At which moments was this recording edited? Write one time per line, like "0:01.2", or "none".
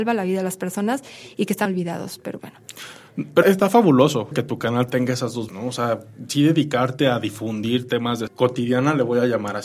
0:01.6
0:02.4
0:03.4
0:04.3
0:05.5
0:08.3